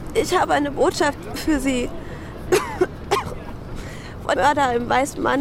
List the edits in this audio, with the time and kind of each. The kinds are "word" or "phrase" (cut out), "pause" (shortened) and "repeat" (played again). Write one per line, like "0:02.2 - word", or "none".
0:04.4 - word